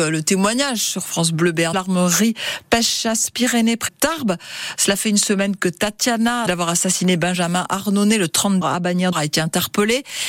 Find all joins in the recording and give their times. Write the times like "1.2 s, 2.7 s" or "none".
1.7 s, 3.9 s, 6.5 s, 8.6 s, 9.1 s